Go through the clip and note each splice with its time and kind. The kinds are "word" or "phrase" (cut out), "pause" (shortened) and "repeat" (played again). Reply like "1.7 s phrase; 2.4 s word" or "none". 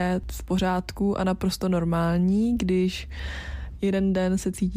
none